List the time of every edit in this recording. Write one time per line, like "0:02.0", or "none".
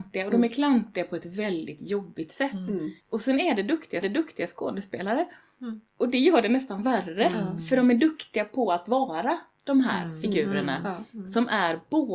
0:03.0
0:04.0